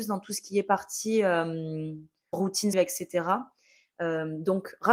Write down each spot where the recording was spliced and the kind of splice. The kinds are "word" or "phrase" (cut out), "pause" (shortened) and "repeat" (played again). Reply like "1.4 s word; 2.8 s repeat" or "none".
2.3 s word; 2.7 s word